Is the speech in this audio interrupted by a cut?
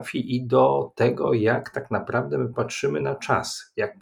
no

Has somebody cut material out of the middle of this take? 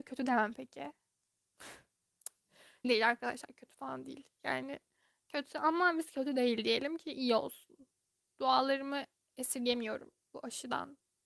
yes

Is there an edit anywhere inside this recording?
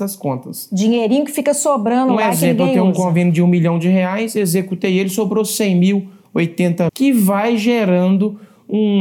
yes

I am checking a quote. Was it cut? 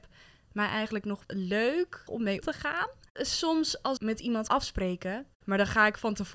yes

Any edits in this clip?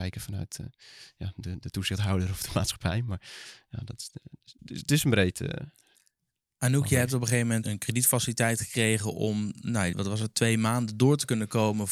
yes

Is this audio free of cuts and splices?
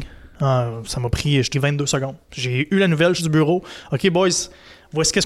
no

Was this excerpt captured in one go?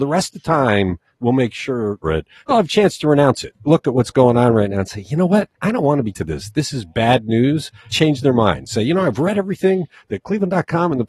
no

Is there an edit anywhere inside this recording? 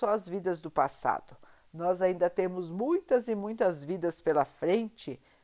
no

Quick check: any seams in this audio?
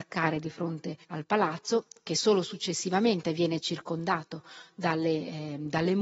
yes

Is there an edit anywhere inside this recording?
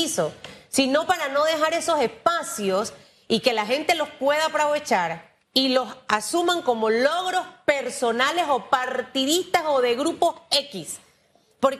yes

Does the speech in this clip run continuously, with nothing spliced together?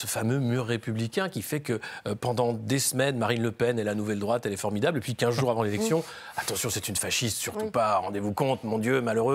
yes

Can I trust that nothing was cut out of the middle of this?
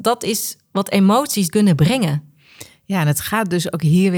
no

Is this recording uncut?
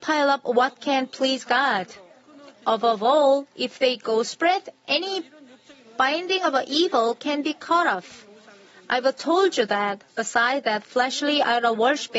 yes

